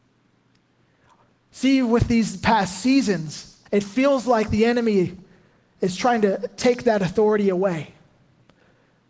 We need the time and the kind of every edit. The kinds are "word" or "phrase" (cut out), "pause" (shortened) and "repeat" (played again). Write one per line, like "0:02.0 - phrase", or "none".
0:03.7 - pause